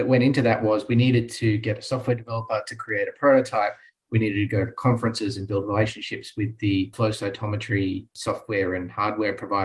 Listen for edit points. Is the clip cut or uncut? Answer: uncut